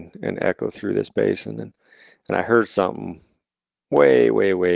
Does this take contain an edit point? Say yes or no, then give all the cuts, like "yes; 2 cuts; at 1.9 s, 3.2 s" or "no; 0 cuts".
no; 0 cuts